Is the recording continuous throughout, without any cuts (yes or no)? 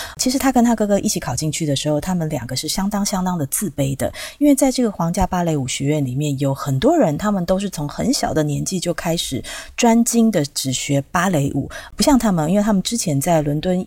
yes